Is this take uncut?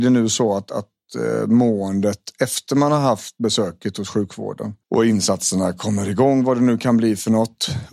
no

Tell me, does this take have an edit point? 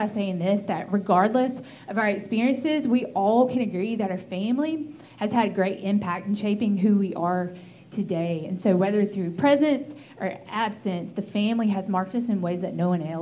no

